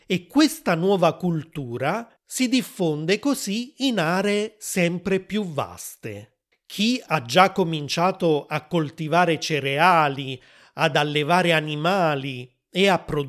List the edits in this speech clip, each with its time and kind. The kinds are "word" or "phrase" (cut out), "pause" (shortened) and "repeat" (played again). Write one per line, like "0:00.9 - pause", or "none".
0:02.2 - pause
0:06.5 - pause